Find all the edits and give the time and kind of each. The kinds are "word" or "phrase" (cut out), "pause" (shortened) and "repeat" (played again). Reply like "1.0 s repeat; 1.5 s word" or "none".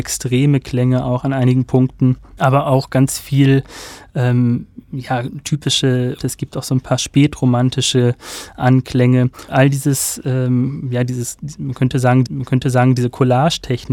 6.2 s word; 9.5 s word; 12.3 s repeat

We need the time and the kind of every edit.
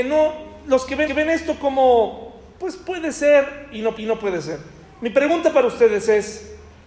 1.1 s repeat; 4.0 s repeat

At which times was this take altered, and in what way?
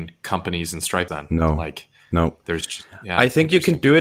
1.1 s word

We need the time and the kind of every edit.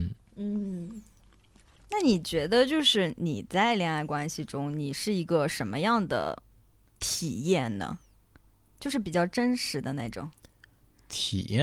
none

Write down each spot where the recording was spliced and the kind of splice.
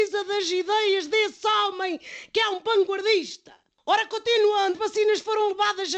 4.7 s word

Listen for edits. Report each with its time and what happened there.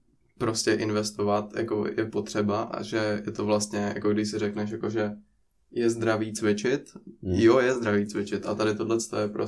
none

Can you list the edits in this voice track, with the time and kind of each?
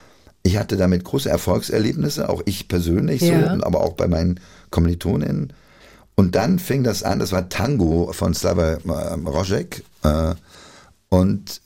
none

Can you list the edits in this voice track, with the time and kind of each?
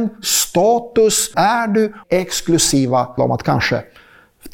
1.3 s word; 2.0 s word; 3.2 s phrase

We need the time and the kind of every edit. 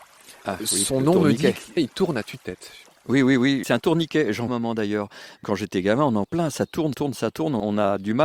1.8 s word; 4.5 s phrase; 6.2 s word; 6.9 s word

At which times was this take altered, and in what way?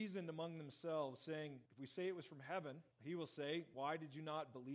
1.7 s pause; 2.9 s pause; 3.7 s word

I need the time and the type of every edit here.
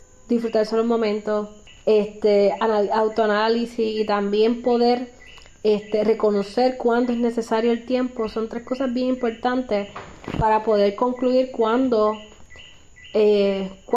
1.7 s pause

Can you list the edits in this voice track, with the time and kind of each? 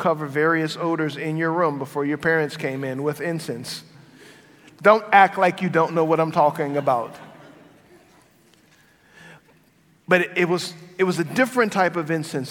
none

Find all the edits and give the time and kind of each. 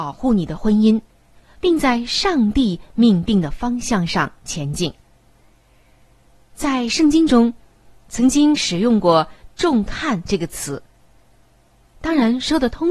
none

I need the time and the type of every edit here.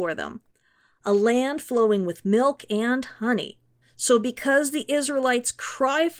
3.8 s pause

